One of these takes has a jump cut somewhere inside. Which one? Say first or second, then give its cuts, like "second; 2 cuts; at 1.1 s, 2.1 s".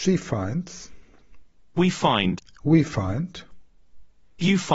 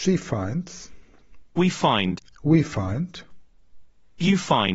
second; 1 cut; at 1.5 s